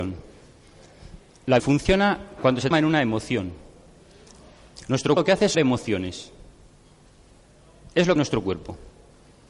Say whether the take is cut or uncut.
cut